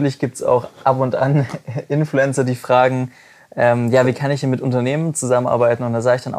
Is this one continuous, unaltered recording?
yes; 0 cuts

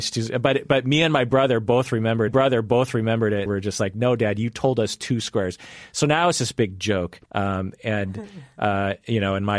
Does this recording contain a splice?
yes; 3 cuts; at 2.3 s, 3.5 s, 7.3 s

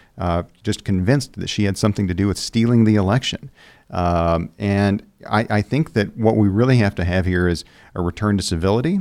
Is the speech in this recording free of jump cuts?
yes; 0 cuts

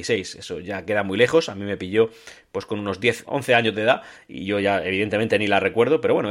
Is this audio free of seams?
no; 1 cut; at 3.2 s

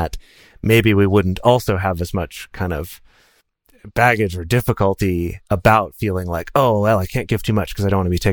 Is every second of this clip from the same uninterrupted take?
yes; 0 cuts

